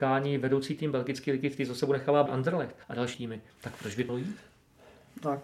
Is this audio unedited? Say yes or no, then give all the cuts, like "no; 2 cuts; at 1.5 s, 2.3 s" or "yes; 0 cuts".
no; 5 cuts; at 2.3 s, 2.8 s, 3.1 s, 3.5 s, 4.1 s